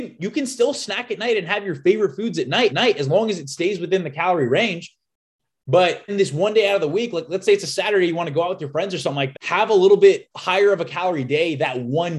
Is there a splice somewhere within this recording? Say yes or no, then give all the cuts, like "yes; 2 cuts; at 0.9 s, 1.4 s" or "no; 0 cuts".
yes; 4 cuts; at 2.7 s, 6.1 s, 9.3 s, 10.3 s